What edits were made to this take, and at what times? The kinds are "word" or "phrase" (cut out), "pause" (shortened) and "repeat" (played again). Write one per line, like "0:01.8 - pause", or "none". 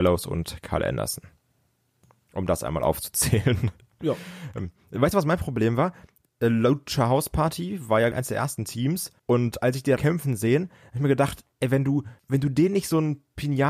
0:05.1 - phrase
0:08.1 - word
0:09.2 - pause
0:10.0 - word
0:12.2 - pause